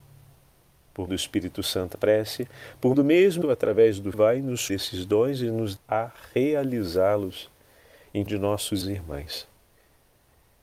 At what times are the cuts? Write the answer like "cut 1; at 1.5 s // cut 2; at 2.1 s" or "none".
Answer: cut 1; at 1.1 s // cut 2; at 1.9 s // cut 3; at 2.9 s // cut 4; at 3.4 s // cut 5; at 4.1 s // cut 6; at 4.7 s // cut 7; at 5.8 s // cut 8; at 8.3 s // cut 9; at 8.8 s